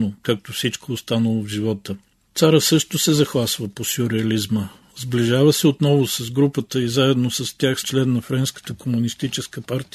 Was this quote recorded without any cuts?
no; 1 cut; at 7.8 s

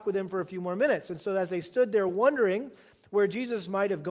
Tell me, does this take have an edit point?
no; 0 cuts

